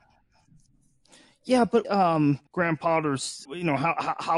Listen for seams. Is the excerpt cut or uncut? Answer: cut